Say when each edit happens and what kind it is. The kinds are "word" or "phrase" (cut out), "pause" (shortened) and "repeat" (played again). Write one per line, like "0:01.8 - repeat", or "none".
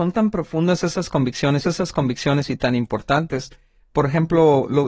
0:01.6 - repeat